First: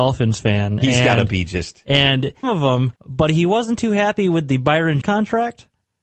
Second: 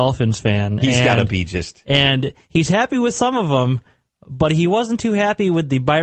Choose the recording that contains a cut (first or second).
first